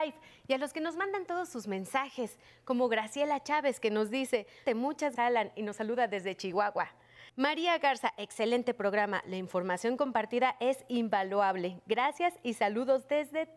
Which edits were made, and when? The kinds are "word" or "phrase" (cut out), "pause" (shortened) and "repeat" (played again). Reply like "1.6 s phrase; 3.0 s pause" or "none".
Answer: 4.7 s phrase; 5.2 s word; 7.3 s pause